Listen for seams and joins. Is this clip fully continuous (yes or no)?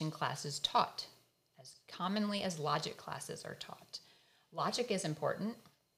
yes